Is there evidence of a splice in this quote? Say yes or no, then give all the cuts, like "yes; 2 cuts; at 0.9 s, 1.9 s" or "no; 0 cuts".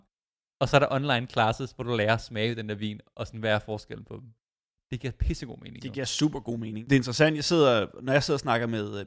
no; 0 cuts